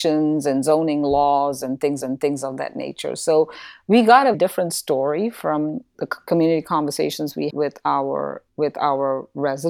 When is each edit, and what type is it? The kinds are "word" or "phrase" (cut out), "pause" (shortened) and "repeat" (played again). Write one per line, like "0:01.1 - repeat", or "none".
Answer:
0:02.0 - repeat
0:04.3 - word
0:07.5 - word
0:08.5 - pause